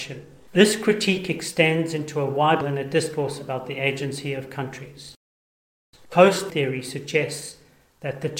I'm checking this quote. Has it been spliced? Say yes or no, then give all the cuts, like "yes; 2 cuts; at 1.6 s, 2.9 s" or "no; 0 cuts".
yes; 2 cuts; at 2.6 s, 6.5 s